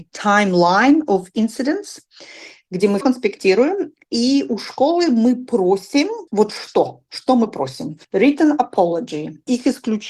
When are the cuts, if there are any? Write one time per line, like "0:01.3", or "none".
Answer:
0:03.0
0:06.3
0:08.0